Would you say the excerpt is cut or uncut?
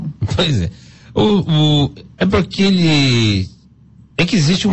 uncut